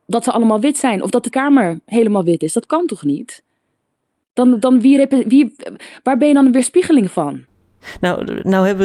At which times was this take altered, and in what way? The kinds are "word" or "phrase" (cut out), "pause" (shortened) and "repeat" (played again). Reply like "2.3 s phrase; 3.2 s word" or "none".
1.3 s word